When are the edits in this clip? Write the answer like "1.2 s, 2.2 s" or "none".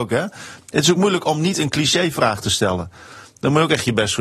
none

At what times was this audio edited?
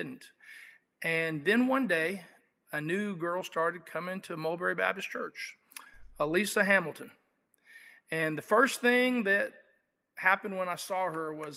none

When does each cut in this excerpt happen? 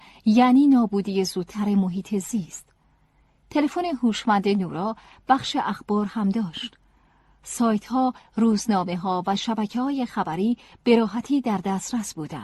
none

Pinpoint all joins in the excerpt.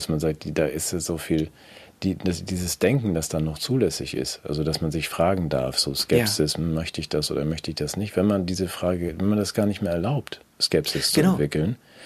10.5 s

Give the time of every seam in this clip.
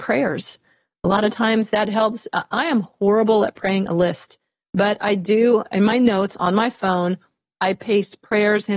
none

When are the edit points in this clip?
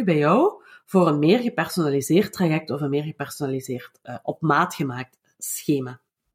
none

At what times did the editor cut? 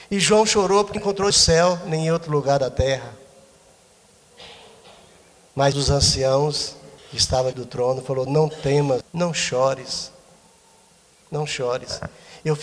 1.0 s, 1.3 s, 5.7 s, 7.0 s, 7.5 s, 9.0 s

